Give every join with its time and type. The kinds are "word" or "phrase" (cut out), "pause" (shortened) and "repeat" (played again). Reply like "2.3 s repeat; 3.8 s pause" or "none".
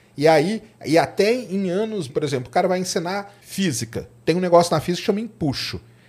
2.1 s phrase; 3.4 s pause